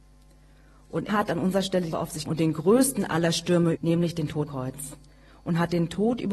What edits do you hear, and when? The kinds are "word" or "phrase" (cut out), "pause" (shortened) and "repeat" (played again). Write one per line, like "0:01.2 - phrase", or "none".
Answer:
0:01.1 - word
0:01.9 - word
0:02.3 - word
0:03.7 - word
0:04.5 - word

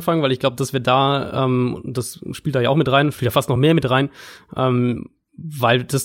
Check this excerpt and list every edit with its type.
none

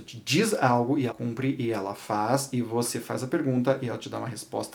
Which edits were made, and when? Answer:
0:01.1 - word

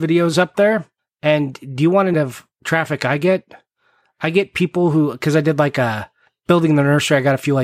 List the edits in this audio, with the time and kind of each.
0:02.1 - phrase

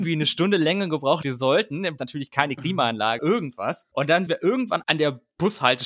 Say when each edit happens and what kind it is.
0:01.2 - word
0:02.0 - word
0:03.2 - word
0:04.3 - word
0:04.8 - word

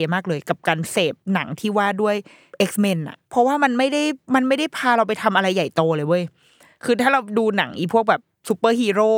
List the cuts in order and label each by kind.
0:01.2 - pause

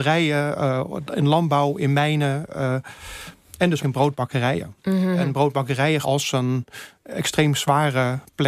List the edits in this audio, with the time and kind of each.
0:03.8 - word
0:06.0 - word

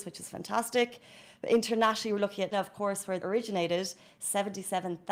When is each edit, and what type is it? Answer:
0:02.5 - word
0:03.2 - phrase

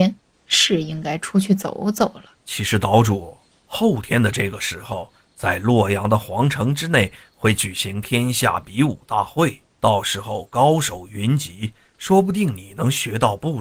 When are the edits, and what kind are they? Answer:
0:02.4 - pause
0:09.7 - pause

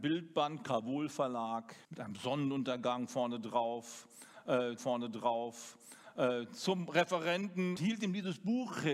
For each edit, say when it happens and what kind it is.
0:01.8 - pause
0:04.8 - repeat
0:07.8 - word

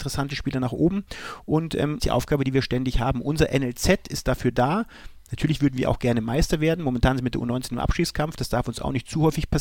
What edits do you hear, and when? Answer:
0:02.0 - phrase

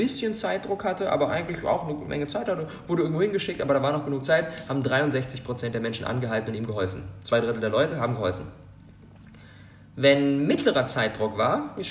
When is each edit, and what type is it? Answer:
none

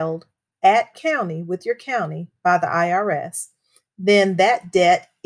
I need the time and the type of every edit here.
0:00.9 - word

